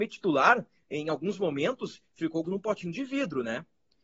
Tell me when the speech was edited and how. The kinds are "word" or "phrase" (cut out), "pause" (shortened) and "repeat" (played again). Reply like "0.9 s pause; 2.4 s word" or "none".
2.4 s word